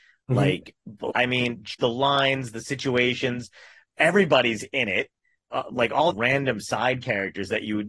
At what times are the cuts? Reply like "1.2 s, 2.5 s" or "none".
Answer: 1.1 s, 1.7 s, 6.1 s